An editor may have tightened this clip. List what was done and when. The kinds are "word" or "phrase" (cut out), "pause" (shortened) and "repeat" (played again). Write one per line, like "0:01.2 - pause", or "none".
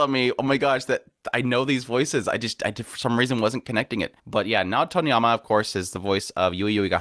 0:04.2 - pause